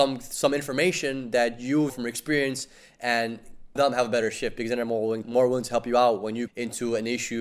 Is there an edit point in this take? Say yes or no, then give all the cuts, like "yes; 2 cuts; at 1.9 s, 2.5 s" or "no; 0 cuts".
yes; 4 cuts; at 1.9 s, 3.8 s, 5.2 s, 6.5 s